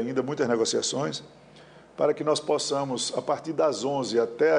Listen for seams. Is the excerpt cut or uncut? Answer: uncut